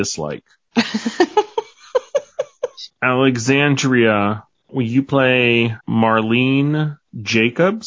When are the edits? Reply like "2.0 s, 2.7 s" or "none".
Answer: 5.8 s